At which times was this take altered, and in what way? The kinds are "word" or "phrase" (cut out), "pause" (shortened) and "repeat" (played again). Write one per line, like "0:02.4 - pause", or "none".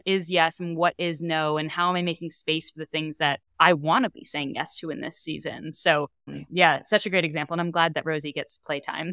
0:03.5 - pause